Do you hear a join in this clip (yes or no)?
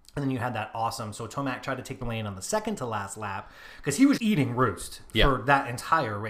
yes